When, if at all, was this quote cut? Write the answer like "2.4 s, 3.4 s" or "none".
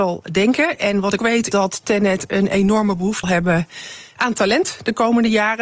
1.2 s, 1.5 s, 3.2 s